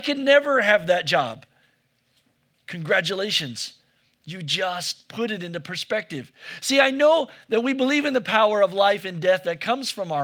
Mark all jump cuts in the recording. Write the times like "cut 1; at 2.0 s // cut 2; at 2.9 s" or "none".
none